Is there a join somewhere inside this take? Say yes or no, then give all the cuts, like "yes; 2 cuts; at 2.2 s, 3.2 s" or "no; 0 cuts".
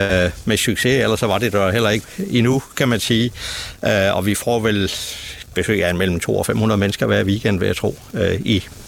no; 0 cuts